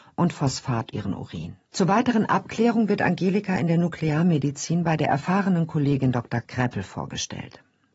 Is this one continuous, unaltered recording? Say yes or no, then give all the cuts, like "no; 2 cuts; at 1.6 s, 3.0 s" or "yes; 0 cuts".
no; 2 cuts; at 0.9 s, 1.6 s